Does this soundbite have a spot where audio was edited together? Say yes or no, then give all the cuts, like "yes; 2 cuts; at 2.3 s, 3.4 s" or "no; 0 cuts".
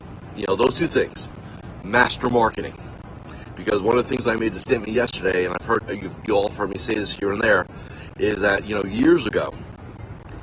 no; 0 cuts